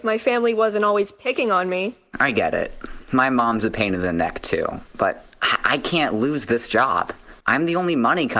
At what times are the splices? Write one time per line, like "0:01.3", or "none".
0:07.4